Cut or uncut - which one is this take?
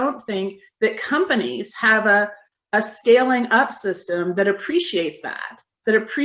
uncut